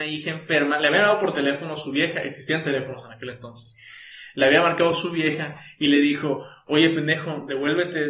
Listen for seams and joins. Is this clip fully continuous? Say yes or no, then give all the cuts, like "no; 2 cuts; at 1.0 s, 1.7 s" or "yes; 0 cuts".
yes; 0 cuts